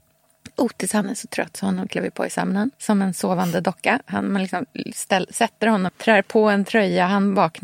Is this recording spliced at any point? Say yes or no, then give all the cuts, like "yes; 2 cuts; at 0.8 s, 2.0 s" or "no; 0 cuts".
yes; 2 cuts; at 2.7 s, 5.9 s